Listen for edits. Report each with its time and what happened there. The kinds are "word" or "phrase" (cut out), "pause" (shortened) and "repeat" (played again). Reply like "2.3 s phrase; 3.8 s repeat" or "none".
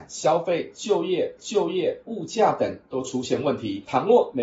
1.4 s repeat